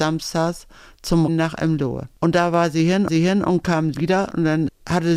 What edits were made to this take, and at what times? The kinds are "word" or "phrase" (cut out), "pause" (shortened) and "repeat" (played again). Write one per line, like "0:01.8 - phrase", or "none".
0:01.3 - word
0:03.1 - repeat
0:03.9 - word